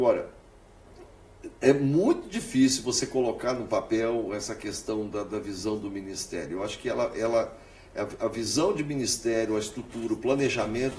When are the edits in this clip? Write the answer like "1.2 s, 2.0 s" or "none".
none